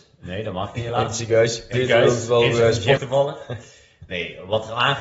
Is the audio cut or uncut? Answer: cut